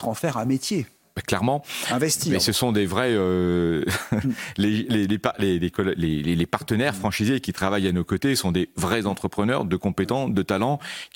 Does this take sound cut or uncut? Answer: uncut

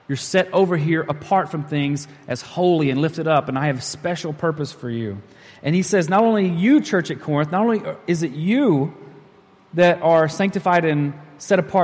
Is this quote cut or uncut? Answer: uncut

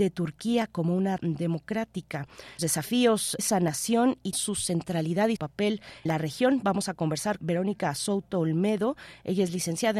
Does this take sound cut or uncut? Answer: cut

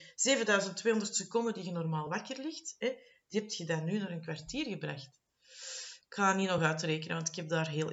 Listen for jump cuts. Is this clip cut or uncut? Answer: uncut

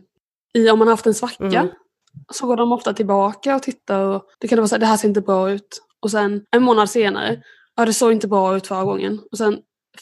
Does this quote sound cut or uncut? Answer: cut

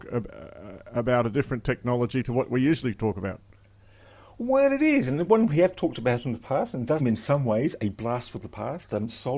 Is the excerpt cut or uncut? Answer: cut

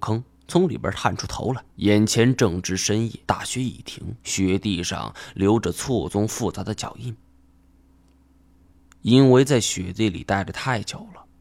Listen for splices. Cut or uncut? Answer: cut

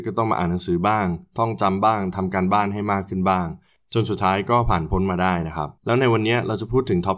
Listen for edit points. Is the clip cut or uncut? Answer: cut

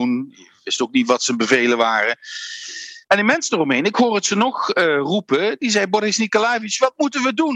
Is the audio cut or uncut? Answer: cut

